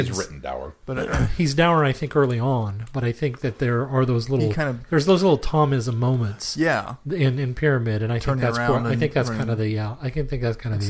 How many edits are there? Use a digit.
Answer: 0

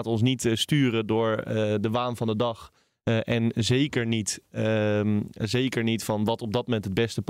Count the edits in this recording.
0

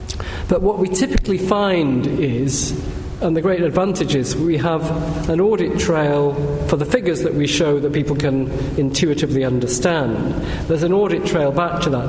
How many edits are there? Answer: 0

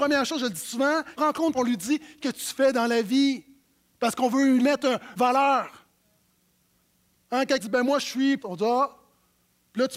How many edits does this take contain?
7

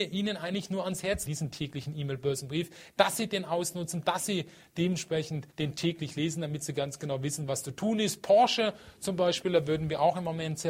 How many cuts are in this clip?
2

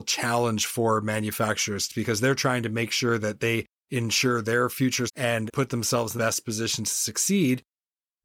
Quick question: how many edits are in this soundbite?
3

